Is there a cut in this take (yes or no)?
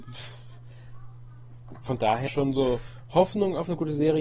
yes